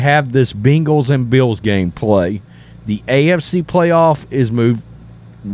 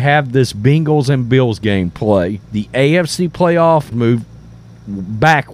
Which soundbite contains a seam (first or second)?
second